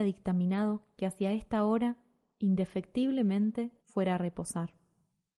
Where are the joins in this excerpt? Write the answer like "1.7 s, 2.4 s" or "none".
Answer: 3.8 s